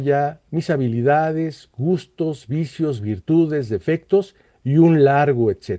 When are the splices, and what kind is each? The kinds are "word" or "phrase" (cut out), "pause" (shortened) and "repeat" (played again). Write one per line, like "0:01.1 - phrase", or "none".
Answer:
none